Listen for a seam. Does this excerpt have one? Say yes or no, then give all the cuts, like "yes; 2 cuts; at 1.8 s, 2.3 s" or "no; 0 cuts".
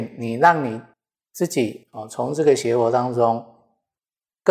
no; 0 cuts